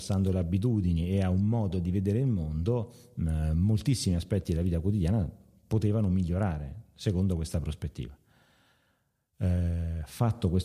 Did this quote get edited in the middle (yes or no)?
no